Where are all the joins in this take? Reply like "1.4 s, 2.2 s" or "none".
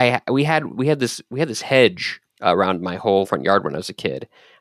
2.3 s, 3.2 s